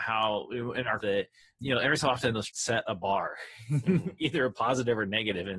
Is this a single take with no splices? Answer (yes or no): no